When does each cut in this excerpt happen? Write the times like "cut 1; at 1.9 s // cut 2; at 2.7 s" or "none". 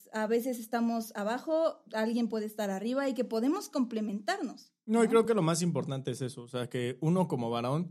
none